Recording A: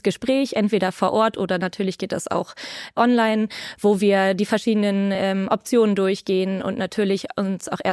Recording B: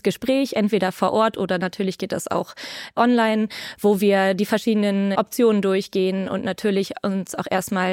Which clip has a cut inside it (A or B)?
B